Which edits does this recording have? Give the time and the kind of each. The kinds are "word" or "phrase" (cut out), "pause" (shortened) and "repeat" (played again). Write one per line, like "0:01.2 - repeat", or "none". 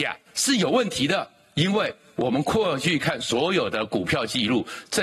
none